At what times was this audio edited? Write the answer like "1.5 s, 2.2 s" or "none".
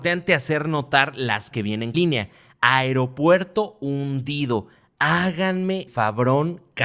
1.5 s, 1.9 s, 5.9 s